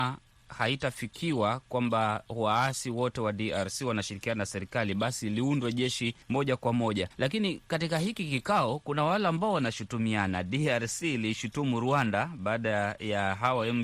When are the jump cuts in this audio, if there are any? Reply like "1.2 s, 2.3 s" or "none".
6.2 s, 7.1 s